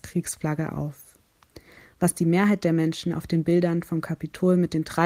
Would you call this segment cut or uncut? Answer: uncut